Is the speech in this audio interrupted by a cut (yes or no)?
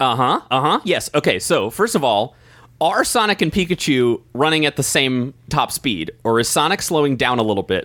no